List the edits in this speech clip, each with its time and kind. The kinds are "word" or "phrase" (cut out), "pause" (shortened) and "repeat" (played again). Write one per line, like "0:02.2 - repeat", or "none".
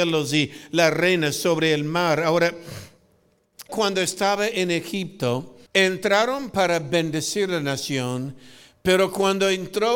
0:03.7 - word
0:05.7 - pause